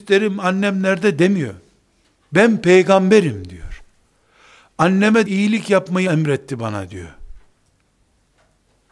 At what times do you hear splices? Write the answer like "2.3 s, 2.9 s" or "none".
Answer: 5.2 s, 6.1 s